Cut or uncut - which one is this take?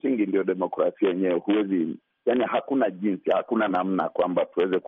uncut